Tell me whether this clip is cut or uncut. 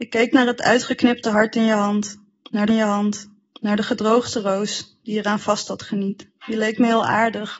cut